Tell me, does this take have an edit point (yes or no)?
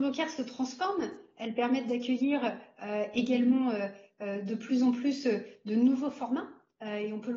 no